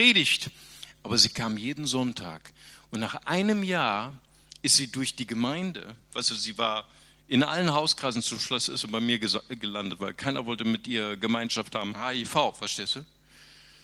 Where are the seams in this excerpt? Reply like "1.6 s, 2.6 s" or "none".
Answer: none